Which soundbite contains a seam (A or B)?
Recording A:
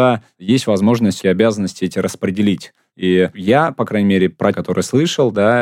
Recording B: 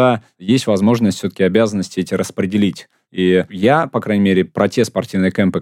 A